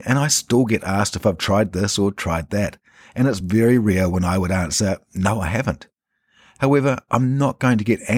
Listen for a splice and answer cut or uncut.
uncut